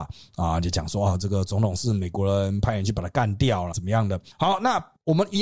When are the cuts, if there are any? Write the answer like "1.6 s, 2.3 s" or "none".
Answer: 3.7 s